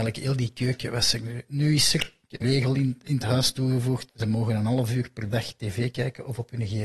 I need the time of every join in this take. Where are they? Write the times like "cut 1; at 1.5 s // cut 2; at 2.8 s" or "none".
cut 1; at 2.4 s // cut 2; at 4.1 s